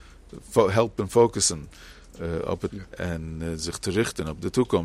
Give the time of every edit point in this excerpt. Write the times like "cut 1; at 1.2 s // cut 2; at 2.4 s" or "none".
cut 1; at 2.7 s